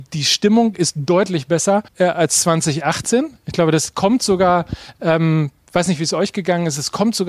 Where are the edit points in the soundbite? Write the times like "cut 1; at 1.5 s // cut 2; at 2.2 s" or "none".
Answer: cut 1; at 1.9 s